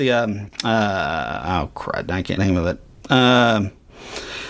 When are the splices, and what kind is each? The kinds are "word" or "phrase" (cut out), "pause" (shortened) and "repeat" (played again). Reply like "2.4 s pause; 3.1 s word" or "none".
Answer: 2.4 s word